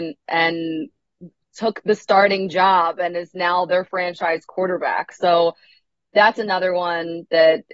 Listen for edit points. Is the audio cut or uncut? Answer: uncut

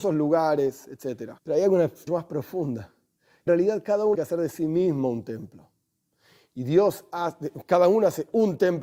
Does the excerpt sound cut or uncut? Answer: cut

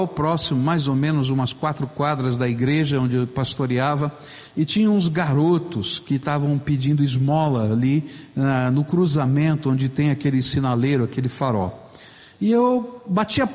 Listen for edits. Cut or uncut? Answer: uncut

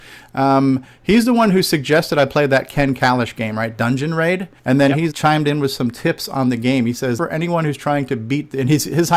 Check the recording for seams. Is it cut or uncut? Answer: cut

